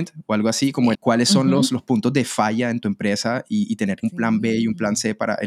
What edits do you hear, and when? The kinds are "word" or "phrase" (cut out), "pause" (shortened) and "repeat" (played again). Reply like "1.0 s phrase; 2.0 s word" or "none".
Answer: 0.9 s word; 4.0 s word